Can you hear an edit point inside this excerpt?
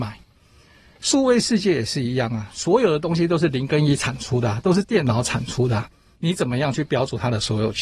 no; 0 cuts

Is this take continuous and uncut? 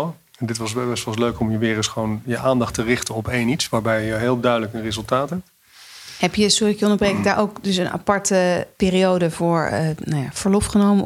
yes; 0 cuts

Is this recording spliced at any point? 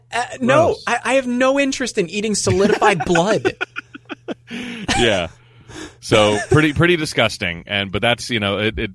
no; 0 cuts

